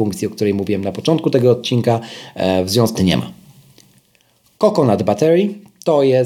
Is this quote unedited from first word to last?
no; 1 cut; at 3.0 s

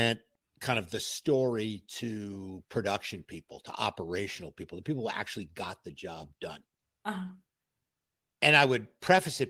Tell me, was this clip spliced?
no; 0 cuts

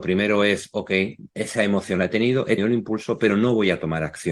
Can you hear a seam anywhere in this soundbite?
yes; 1 cut; at 2.6 s

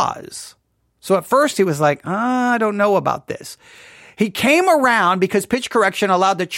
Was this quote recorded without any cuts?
yes; 0 cuts

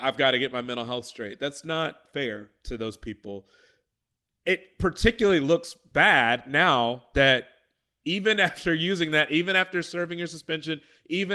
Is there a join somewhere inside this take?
no; 0 cuts

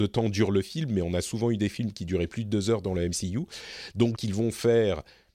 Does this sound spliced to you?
yes; 1 cut; at 4.1 s

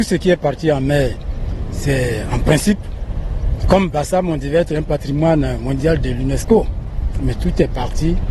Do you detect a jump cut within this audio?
no; 0 cuts

